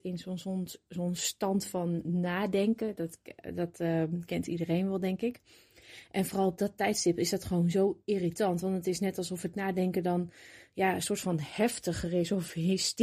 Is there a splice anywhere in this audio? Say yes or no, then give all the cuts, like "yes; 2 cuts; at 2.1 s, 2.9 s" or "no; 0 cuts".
no; 0 cuts